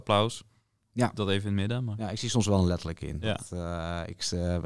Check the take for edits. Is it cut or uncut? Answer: uncut